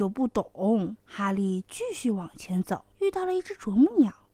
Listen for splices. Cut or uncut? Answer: cut